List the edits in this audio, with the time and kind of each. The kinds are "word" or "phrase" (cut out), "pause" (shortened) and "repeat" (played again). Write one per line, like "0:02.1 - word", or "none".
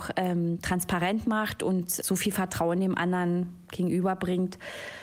none